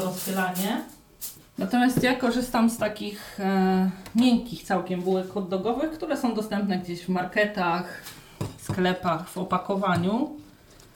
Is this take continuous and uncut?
yes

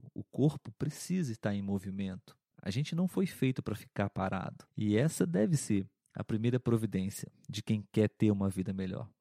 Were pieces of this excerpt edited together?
yes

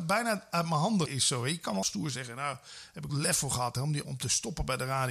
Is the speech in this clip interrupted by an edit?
yes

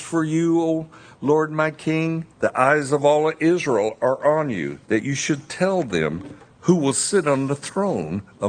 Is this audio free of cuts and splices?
no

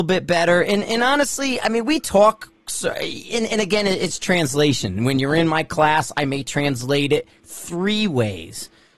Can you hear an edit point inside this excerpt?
no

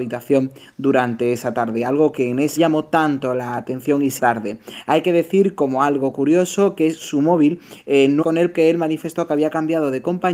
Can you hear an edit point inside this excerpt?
yes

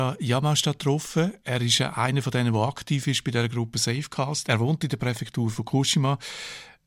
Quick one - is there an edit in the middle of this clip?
no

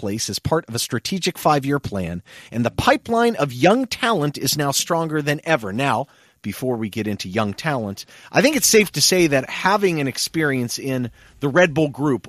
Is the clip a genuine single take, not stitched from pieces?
yes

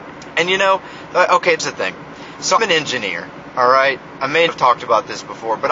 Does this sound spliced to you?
yes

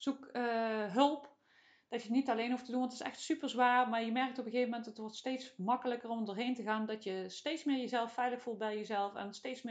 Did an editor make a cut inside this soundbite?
no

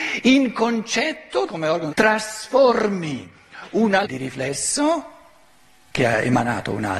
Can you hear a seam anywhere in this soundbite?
yes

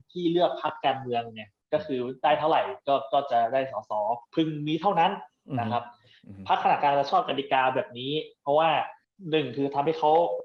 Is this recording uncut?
no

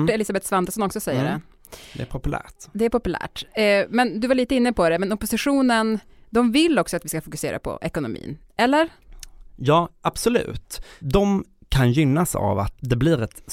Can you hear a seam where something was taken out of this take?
no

